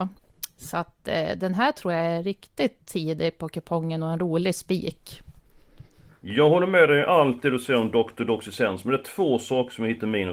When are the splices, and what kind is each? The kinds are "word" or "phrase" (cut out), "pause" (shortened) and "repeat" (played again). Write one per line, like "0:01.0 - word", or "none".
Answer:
none